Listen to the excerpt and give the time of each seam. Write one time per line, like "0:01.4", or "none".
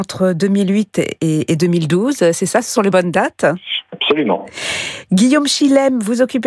none